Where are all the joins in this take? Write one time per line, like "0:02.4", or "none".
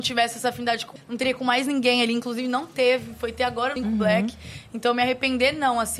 0:01.0
0:03.8